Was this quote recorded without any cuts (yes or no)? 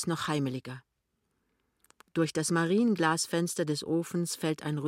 yes